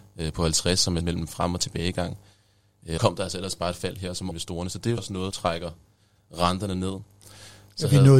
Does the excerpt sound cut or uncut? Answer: cut